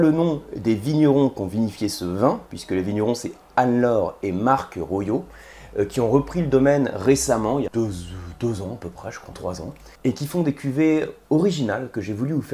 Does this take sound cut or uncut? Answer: cut